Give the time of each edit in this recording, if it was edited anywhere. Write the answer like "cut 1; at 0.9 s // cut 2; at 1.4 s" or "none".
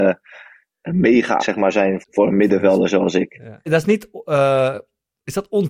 cut 1; at 1.4 s // cut 2; at 2.0 s // cut 3; at 3.7 s